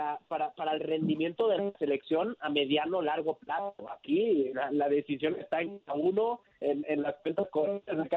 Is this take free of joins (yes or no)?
yes